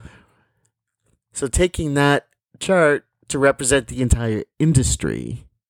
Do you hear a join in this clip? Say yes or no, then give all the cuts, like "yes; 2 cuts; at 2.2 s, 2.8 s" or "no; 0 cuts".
no; 0 cuts